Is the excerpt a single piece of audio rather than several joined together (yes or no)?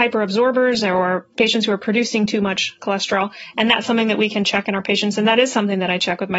yes